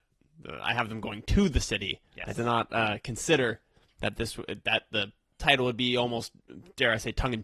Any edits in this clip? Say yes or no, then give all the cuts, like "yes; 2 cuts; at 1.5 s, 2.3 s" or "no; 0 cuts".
no; 0 cuts